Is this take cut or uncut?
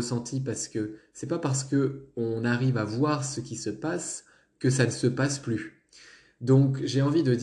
uncut